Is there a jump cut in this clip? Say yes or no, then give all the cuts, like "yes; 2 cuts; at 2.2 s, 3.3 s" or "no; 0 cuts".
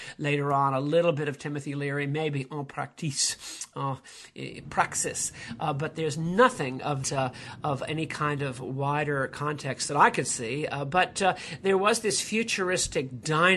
yes; 1 cut; at 7.0 s